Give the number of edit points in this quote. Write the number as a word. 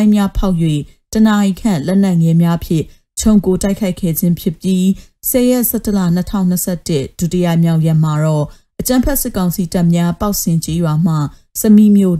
zero